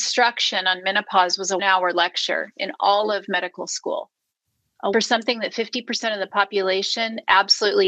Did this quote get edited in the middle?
yes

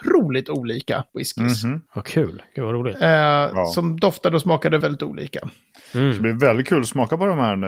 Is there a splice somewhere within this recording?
yes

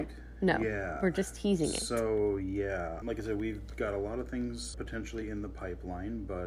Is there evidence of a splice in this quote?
yes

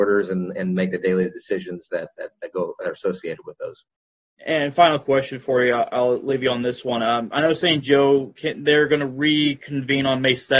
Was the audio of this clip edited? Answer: no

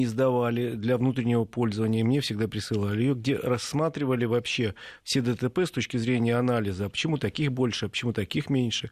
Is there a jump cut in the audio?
no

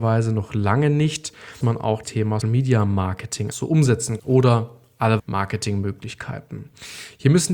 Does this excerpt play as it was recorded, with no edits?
no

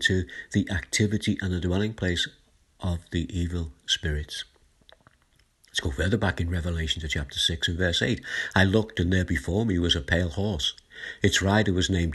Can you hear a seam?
no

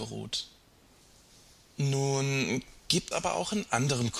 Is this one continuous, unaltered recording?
no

